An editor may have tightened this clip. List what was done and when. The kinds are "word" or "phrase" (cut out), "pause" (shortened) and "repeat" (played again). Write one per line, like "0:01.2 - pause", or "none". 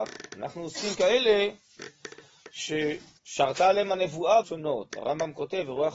0:00.9 - word
0:03.2 - pause
0:04.4 - word